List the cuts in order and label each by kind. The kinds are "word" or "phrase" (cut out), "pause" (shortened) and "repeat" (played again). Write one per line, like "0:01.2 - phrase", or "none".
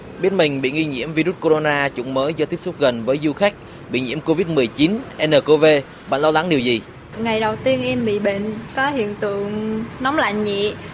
none